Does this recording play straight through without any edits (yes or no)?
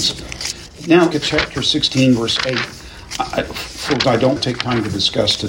no